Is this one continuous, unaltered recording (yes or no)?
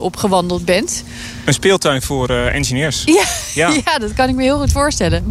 yes